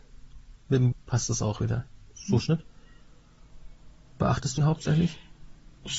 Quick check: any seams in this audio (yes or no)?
yes